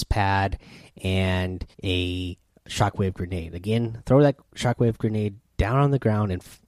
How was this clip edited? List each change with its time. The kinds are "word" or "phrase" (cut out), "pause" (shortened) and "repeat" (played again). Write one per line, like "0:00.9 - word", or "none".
0:01.7 - pause
0:04.5 - pause